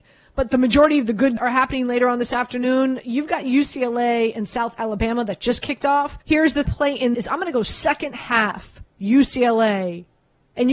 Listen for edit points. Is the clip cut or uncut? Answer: cut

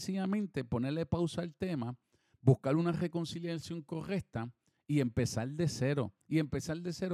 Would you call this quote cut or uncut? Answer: uncut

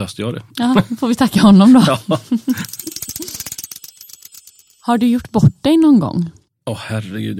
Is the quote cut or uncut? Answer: uncut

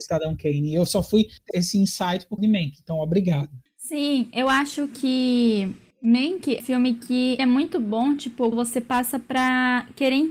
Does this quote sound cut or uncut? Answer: cut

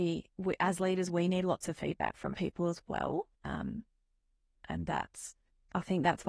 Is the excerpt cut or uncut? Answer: cut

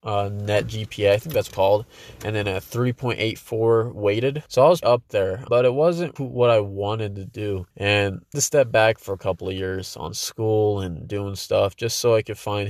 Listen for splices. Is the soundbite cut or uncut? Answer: cut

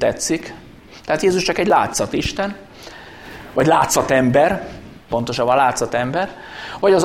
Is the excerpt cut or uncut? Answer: uncut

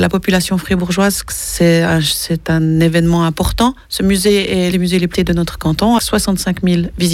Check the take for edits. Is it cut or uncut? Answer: cut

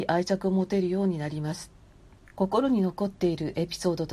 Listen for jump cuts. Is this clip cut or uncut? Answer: cut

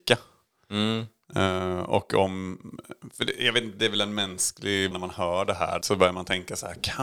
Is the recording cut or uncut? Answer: cut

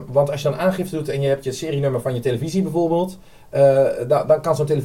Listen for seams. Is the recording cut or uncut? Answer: uncut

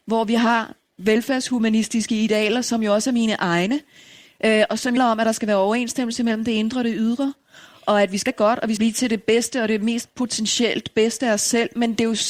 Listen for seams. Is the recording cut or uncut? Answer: cut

